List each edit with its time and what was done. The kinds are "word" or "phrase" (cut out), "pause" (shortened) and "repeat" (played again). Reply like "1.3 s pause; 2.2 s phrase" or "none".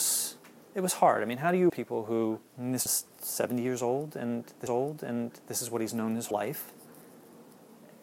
1.7 s word; 2.5 s pause; 2.9 s word; 4.7 s repeat; 6.3 s word

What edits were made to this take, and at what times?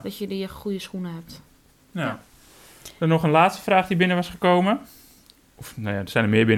none

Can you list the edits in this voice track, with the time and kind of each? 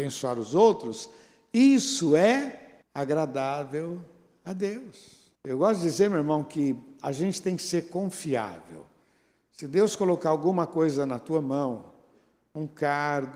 2.8 s pause; 5.4 s pause

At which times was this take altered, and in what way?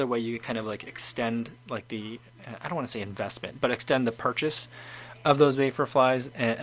none

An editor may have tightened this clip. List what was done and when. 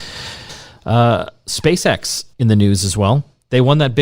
2.3 s pause

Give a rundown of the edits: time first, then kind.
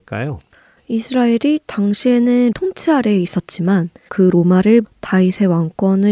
2.5 s word; 4.1 s word; 4.8 s word

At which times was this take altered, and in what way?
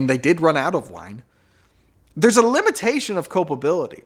none

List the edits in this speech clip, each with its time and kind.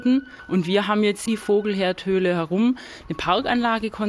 1.3 s word

